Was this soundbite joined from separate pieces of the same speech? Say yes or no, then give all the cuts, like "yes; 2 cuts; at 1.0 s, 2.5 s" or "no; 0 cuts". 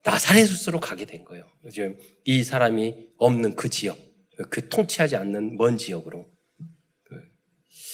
no; 0 cuts